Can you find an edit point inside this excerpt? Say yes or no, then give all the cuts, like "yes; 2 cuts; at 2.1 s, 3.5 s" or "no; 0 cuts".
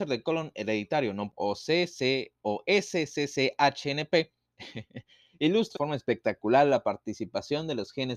yes; 2 cuts; at 1.3 s, 5.8 s